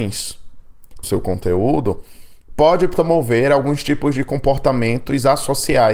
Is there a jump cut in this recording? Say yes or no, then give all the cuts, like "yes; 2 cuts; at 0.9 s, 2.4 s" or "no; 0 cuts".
yes; 1 cut; at 1.0 s